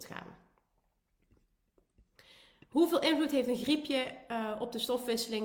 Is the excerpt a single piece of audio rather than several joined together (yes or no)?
yes